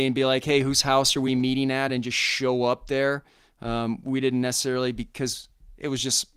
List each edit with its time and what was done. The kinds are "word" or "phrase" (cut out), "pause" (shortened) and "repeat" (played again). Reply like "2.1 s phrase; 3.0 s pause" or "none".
none

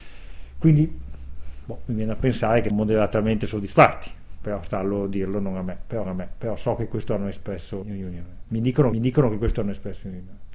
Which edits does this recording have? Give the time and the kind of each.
2.7 s word; 6.0 s repeat; 7.8 s word; 8.9 s repeat

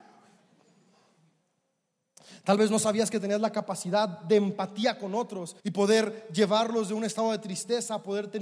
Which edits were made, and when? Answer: 5.6 s pause

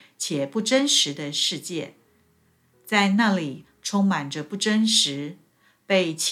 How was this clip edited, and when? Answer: none

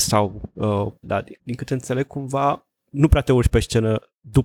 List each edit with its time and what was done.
1.0 s word; 2.7 s word

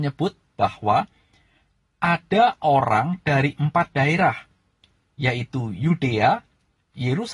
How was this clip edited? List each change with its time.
none

